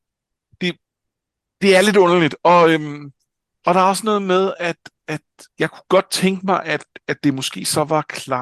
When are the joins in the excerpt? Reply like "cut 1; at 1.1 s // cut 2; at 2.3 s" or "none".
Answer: cut 1; at 5.5 s